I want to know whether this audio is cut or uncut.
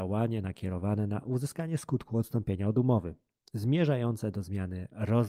uncut